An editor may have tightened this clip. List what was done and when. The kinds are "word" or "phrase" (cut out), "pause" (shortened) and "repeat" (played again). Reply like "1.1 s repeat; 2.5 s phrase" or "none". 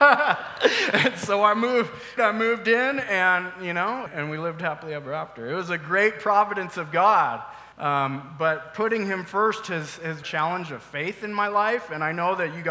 2.2 s phrase; 4.1 s word; 7.7 s pause; 10.2 s phrase

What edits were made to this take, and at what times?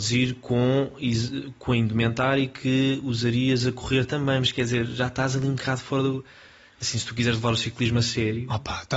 none

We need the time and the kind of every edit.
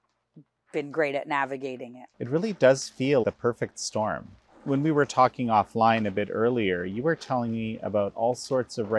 2.1 s pause; 3.2 s word

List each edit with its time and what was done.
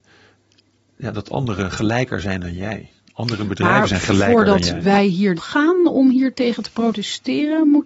5.4 s phrase

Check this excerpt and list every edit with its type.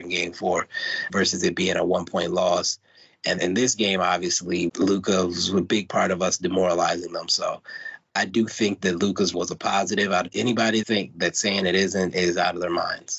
1.1 s word; 3.4 s word; 4.7 s word; 8.8 s word; 9.3 s word; 10.8 s word

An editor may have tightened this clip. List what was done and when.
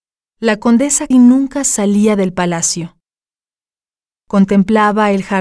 1.1 s word

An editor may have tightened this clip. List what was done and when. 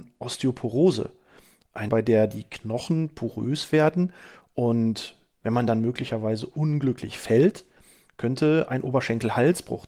1.9 s word

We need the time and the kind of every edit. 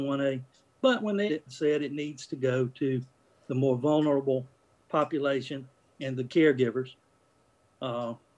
1.3 s word

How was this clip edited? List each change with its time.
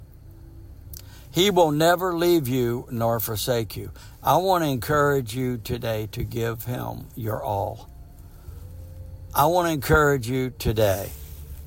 none

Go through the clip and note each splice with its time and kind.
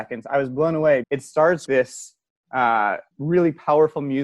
1.0 s word; 1.7 s word; 3.1 s pause

